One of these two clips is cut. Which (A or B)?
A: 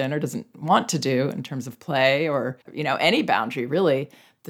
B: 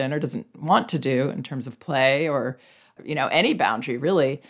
A